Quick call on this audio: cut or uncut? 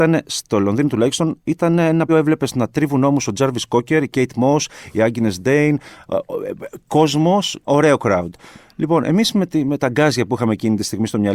cut